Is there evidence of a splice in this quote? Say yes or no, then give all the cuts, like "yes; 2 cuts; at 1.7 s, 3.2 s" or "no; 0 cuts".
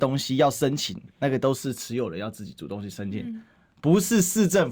no; 0 cuts